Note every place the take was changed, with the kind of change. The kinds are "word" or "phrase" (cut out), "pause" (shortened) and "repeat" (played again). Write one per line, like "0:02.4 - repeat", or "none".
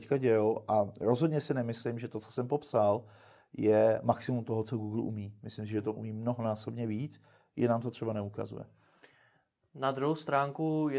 none